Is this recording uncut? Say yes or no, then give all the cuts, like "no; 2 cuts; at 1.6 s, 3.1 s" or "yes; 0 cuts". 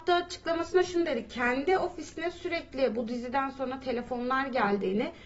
yes; 0 cuts